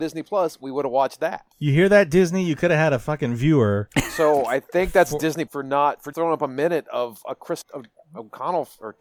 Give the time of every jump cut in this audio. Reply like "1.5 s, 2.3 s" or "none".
1.5 s, 5.5 s, 6.1 s, 7.6 s